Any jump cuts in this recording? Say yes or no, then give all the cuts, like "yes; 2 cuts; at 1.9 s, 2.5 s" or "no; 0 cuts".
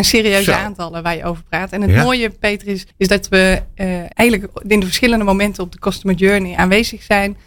yes; 2 cuts; at 2.9 s, 4.1 s